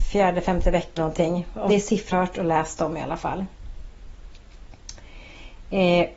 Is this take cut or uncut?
cut